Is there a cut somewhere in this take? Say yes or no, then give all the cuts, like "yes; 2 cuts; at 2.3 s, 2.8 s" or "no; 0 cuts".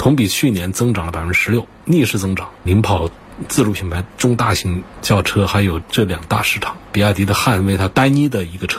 yes; 1 cut; at 5.8 s